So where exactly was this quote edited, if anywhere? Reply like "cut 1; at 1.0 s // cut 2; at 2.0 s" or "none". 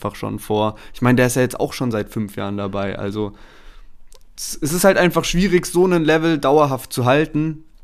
none